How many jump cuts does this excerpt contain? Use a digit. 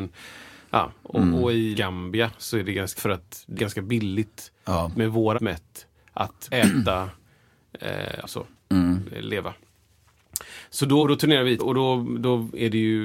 8